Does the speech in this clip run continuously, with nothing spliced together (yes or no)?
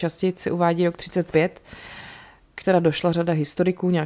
no